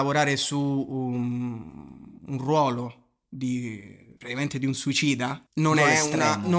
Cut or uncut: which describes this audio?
cut